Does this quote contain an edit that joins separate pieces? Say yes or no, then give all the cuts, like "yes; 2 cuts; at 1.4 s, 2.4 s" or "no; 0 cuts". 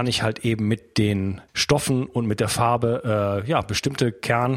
yes; 1 cut; at 1.5 s